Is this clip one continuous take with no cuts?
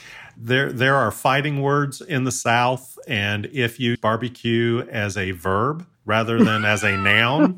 no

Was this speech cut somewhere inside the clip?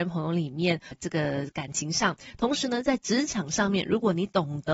yes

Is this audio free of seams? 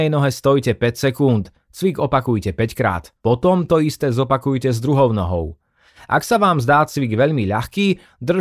yes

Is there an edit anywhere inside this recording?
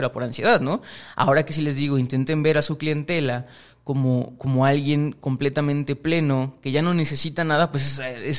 no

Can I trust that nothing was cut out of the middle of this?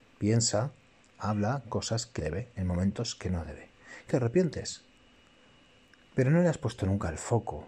no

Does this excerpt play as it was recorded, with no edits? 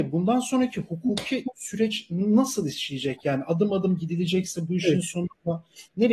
yes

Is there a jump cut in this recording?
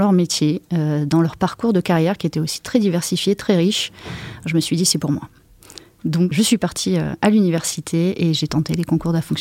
yes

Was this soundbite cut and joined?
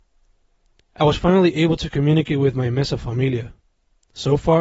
no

